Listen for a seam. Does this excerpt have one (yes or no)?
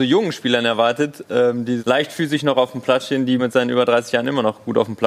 yes